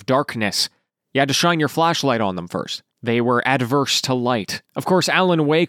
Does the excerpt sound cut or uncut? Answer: cut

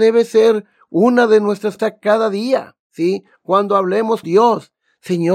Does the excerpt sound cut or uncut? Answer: cut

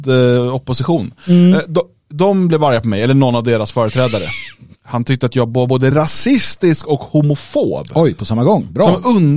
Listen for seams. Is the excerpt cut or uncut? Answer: uncut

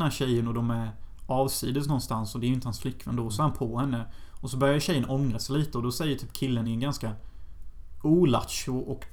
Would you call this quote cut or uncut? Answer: uncut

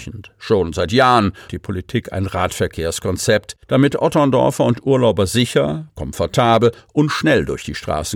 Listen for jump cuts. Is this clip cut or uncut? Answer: cut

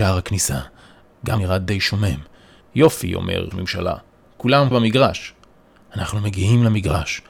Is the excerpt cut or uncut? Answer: cut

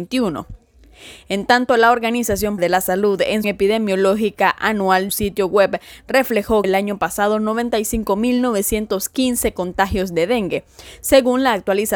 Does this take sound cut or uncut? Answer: cut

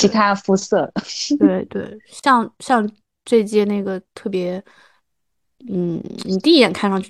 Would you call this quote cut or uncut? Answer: uncut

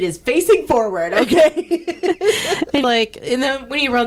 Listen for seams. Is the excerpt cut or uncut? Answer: cut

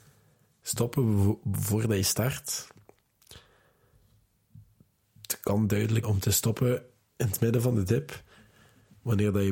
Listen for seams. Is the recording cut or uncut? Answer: cut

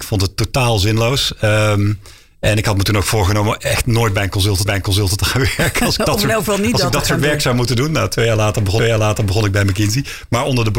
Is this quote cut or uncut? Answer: cut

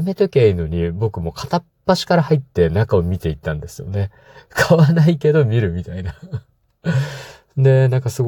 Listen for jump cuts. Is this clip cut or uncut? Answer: uncut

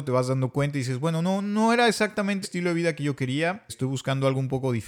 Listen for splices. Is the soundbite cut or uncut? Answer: cut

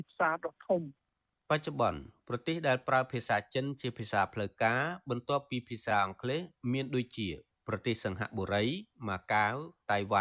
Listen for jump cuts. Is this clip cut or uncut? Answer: uncut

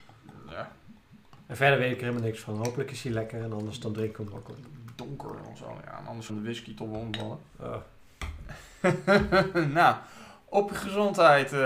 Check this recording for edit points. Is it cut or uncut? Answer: cut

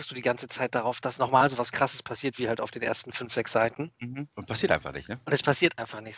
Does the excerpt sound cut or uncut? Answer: cut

